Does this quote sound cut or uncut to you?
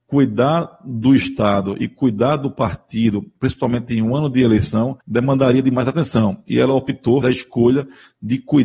cut